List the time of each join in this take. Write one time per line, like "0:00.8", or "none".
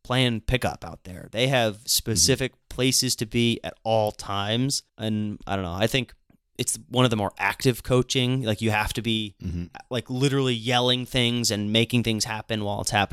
0:04.9
0:06.3